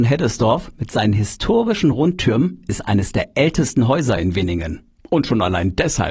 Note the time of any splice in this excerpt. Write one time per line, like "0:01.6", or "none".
none